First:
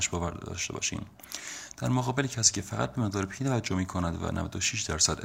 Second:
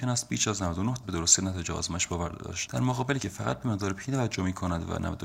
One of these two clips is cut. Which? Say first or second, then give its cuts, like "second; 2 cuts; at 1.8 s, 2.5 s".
second; 3 cuts; at 1.0 s, 2.7 s, 3.2 s